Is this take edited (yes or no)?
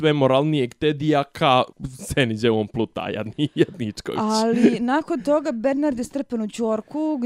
yes